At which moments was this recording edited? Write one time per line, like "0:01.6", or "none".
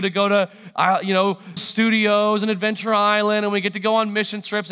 0:01.6